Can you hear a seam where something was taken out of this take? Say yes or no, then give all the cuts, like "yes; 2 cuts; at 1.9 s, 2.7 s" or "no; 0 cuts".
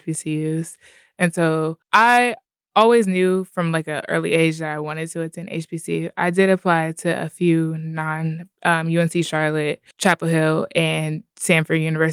yes; 2 cuts; at 1.8 s, 9.9 s